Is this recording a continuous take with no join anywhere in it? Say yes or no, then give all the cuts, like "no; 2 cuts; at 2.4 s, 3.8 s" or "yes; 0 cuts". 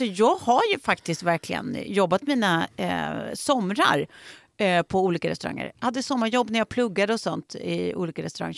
yes; 0 cuts